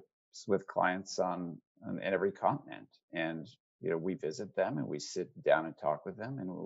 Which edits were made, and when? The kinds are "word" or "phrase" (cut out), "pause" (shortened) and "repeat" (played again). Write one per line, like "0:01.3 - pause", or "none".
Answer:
none

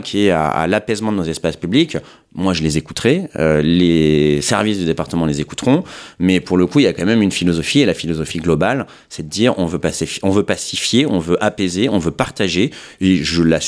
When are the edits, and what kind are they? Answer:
none

